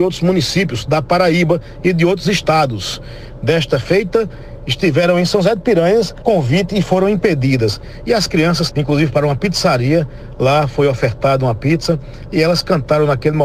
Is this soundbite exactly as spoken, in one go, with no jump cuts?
no; 2 cuts; at 6.2 s, 8.7 s

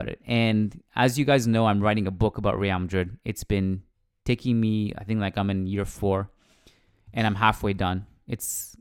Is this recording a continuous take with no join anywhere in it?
yes; 0 cuts

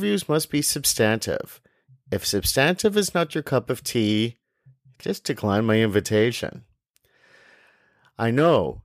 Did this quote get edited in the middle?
no; 0 cuts

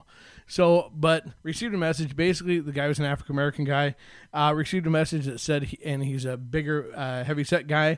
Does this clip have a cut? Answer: yes; 1 cut; at 1.4 s

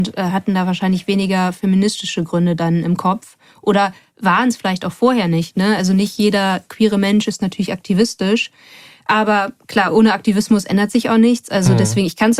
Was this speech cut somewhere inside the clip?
no; 0 cuts

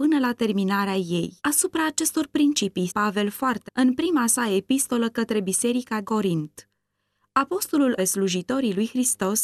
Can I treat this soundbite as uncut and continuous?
no; 5 cuts; at 1.4 s, 2.9 s, 3.7 s, 6.0 s, 8.0 s

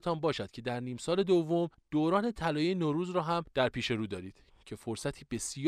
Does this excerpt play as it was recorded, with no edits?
yes; 0 cuts

